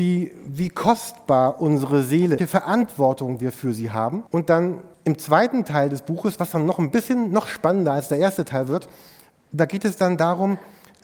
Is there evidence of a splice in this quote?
yes; 3 cuts; at 2.4 s, 4.3 s, 4.9 s

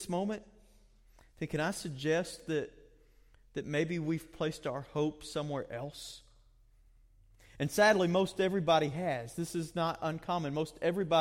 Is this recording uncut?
yes; 0 cuts

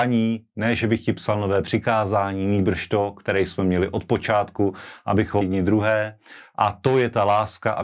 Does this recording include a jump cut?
yes; 1 cut; at 5.4 s

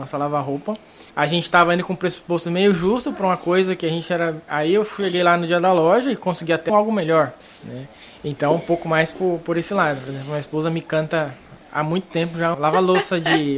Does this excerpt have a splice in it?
yes; 4 cuts; at 1.1 s, 6.7 s, 7.4 s, 12.5 s

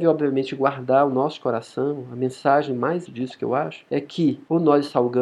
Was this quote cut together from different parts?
yes; 1 cut; at 3.1 s

